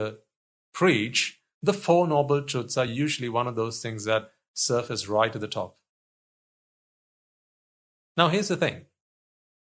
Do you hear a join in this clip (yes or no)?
no